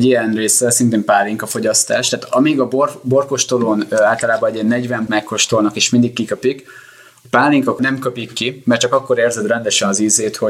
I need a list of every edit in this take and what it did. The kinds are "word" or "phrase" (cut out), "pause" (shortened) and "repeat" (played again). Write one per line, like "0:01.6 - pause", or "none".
0:05.1 - word
0:07.8 - phrase